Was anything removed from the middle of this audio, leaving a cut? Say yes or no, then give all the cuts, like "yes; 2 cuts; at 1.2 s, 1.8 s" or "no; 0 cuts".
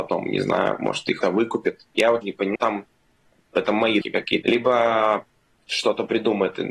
yes; 5 cuts; at 1.2 s, 2.2 s, 2.6 s, 4.0 s, 4.4 s